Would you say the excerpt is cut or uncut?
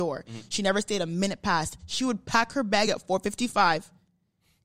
uncut